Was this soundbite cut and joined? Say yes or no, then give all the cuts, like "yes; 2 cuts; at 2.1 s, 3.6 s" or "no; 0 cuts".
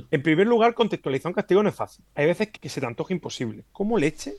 yes; 1 cut; at 2.6 s